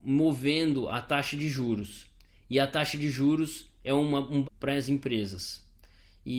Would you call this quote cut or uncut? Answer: cut